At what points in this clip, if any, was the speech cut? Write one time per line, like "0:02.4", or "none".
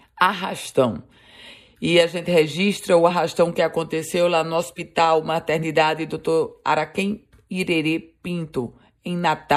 none